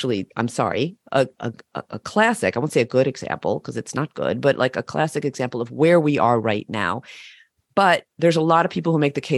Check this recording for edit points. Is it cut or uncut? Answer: uncut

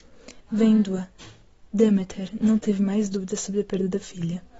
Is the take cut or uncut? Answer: uncut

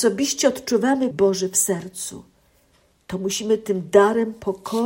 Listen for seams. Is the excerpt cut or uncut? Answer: cut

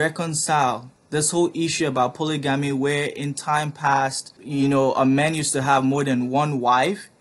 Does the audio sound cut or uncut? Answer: uncut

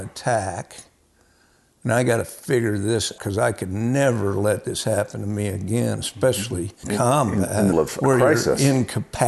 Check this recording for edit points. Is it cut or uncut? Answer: cut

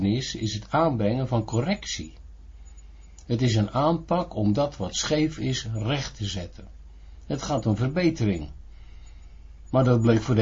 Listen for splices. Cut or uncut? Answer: uncut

